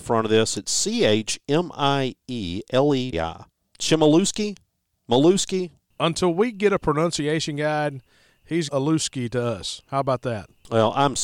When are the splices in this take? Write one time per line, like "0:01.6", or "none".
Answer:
0:03.1
0:08.7